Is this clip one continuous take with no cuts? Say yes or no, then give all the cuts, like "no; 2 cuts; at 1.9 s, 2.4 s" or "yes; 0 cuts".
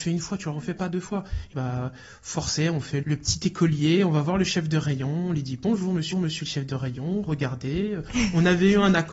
no; 3 cuts; at 1.5 s, 3.0 s, 6.1 s